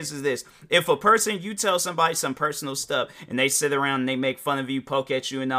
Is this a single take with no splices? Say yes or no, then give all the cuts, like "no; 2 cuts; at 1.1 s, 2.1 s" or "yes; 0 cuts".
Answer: yes; 0 cuts